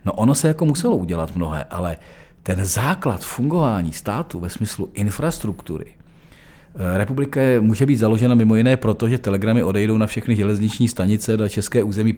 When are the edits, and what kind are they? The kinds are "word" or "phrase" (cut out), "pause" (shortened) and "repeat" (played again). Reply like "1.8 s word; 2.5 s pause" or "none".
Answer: none